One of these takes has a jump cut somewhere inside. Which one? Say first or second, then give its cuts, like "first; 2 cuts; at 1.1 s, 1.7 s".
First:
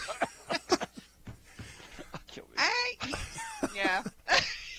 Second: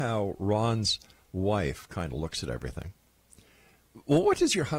first; 1 cut; at 2.2 s